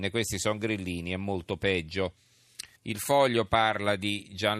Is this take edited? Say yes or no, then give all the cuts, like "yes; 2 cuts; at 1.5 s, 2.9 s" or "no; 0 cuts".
yes; 1 cut; at 2.7 s